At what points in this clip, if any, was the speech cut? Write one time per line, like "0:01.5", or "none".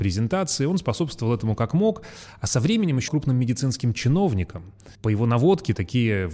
0:03.1
0:04.9